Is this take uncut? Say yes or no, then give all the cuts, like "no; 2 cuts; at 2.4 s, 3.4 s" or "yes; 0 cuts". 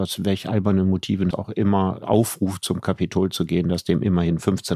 no; 2 cuts; at 1.3 s, 2.0 s